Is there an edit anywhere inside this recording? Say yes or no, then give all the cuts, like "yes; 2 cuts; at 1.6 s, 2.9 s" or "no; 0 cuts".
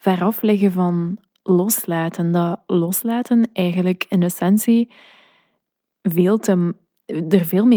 no; 0 cuts